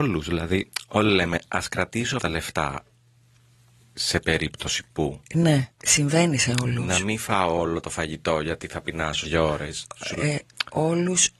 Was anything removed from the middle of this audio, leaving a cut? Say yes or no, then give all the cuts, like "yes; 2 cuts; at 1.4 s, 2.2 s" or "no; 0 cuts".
yes; 3 cuts; at 2.2 s, 5.7 s, 9.2 s